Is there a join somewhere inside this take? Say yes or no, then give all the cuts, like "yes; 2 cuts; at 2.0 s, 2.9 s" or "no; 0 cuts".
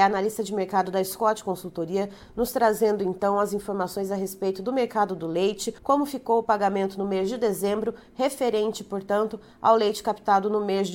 yes; 1 cut; at 5.8 s